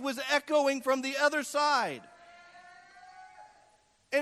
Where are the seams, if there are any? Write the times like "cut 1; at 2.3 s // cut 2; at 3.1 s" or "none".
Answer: none